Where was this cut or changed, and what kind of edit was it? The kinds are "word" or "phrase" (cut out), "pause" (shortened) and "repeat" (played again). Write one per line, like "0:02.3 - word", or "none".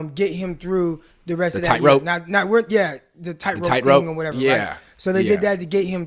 none

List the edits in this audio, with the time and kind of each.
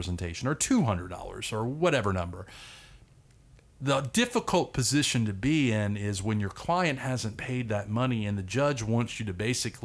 none

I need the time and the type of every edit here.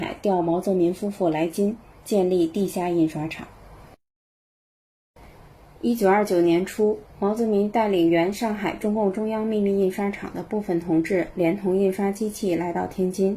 none

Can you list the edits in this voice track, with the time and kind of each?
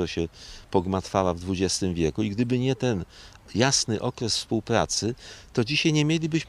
none

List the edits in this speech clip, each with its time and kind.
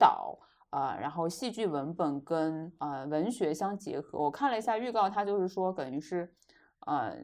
0:02.8 - pause

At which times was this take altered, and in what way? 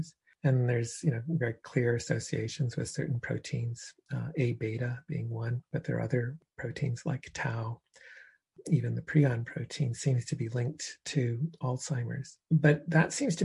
0:12.4 - pause

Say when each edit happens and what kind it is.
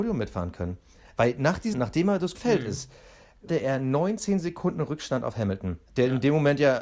0:01.7 - phrase
0:02.3 - word
0:03.5 - word
0:05.9 - pause

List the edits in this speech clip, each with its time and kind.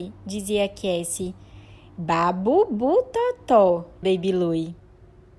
0:04.0 - word

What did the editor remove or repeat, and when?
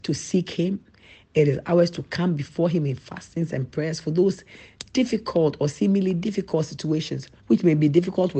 0:07.4 - pause

